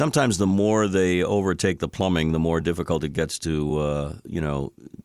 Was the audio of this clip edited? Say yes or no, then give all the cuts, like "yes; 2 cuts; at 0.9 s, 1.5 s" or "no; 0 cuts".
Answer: no; 0 cuts